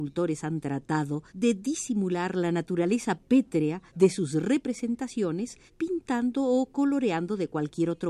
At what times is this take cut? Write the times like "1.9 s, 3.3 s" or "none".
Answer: 1.3 s, 3.9 s, 5.7 s

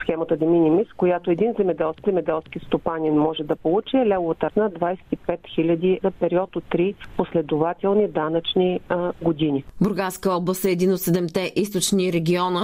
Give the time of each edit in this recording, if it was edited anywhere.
2.0 s, 4.5 s, 6.0 s

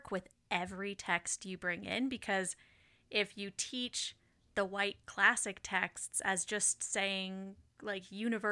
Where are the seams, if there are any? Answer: none

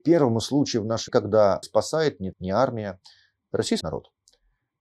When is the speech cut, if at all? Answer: 1.1 s, 1.6 s, 2.3 s, 3.8 s

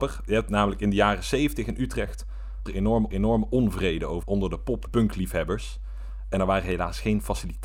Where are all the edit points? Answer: 2.7 s, 3.1 s, 4.2 s, 4.9 s

